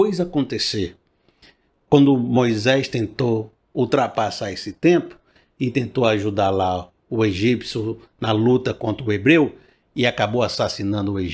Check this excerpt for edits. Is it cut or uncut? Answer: uncut